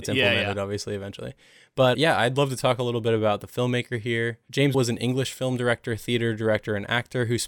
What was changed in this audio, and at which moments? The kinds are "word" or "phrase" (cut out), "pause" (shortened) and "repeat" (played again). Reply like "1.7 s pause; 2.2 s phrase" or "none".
1.9 s word; 4.7 s word